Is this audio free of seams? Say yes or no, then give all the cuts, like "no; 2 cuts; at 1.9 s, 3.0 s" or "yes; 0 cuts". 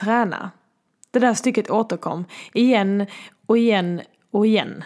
yes; 0 cuts